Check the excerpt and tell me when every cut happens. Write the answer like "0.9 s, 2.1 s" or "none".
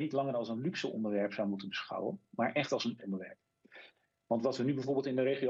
3.0 s